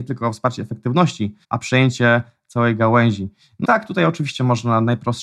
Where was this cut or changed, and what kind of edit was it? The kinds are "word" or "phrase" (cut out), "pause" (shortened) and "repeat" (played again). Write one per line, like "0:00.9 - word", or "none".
0:01.4 - pause
0:03.6 - word